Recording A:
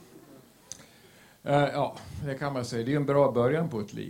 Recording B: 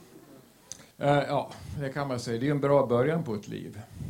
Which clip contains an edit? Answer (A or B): B